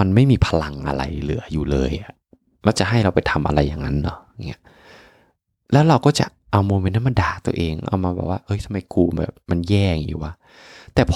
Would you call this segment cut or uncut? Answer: uncut